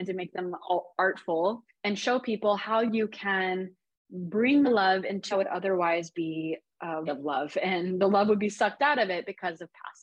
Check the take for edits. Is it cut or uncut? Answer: cut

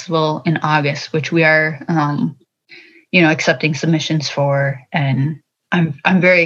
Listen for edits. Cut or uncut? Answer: uncut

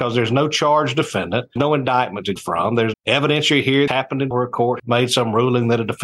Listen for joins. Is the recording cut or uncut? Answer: cut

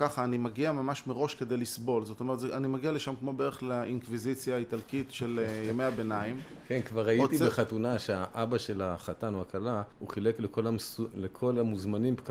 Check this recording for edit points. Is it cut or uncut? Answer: cut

